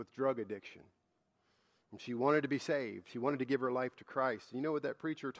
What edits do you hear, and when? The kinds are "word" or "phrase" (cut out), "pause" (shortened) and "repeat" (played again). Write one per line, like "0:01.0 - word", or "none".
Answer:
none